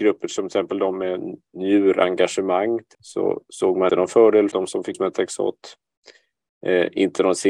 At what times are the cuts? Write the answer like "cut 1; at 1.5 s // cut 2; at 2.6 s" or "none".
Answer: cut 1; at 2.9 s // cut 2; at 3.9 s // cut 3; at 4.5 s // cut 4; at 4.9 s